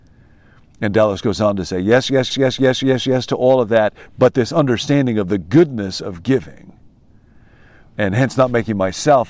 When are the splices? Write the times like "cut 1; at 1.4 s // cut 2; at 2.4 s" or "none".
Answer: cut 1; at 2.3 s